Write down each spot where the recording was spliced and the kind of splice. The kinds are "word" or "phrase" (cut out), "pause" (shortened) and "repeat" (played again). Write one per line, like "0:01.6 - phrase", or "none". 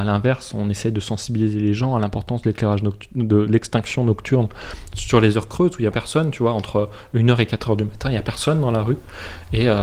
0:05.9 - word